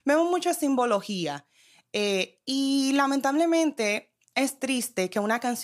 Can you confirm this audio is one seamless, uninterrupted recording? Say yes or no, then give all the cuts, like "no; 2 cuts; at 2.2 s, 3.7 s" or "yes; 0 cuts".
yes; 0 cuts